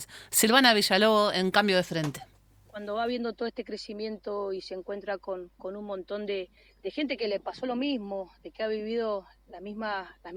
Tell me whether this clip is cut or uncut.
cut